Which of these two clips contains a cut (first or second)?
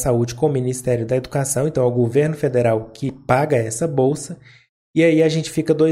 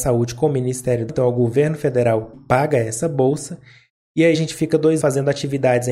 second